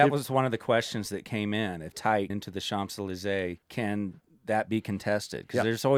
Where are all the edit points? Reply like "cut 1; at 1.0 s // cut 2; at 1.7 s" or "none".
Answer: cut 1; at 1.9 s // cut 2; at 2.3 s // cut 3; at 3.6 s